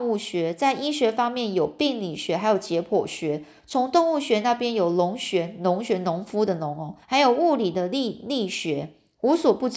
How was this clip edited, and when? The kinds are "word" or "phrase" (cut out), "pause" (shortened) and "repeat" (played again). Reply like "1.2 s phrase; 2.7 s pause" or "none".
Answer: 7.0 s pause